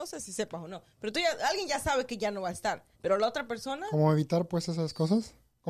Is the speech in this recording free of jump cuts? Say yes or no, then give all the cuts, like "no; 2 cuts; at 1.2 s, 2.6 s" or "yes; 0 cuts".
no; 1 cut; at 2.9 s